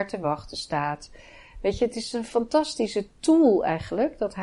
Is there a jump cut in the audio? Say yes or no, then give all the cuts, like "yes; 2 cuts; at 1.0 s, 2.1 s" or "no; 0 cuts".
no; 0 cuts